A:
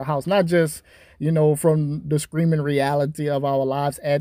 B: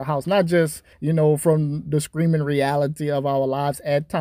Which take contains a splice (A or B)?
B